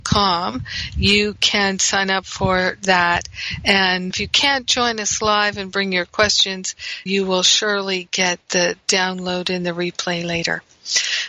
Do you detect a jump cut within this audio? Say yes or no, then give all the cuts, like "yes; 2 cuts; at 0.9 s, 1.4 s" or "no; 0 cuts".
yes; 2 cuts; at 4.1 s, 7.1 s